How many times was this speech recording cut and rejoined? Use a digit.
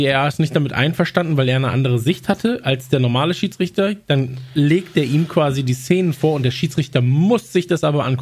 0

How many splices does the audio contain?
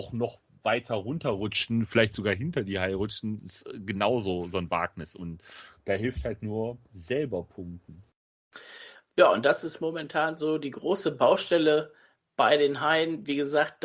1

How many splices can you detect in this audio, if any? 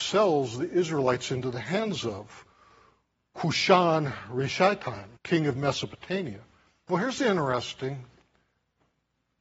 1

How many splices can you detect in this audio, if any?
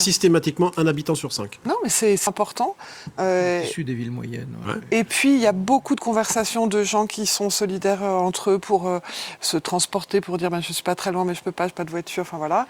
1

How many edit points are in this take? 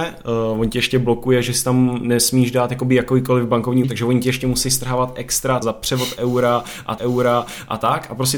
3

